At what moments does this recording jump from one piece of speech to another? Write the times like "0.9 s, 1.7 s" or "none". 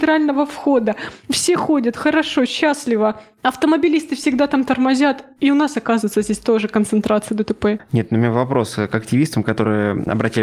none